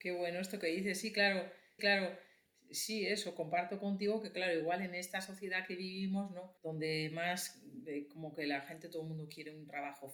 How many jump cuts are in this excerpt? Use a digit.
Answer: 2